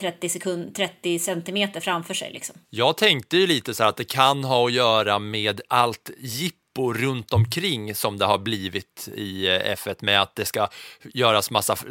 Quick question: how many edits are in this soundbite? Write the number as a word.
one